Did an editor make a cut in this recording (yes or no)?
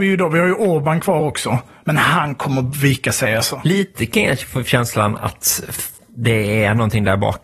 no